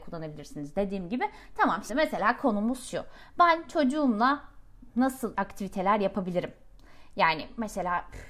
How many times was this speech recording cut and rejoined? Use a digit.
2